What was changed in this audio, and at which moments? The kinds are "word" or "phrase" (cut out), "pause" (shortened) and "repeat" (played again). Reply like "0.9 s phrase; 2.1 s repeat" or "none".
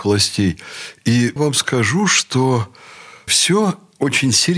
1.4 s word; 3.3 s word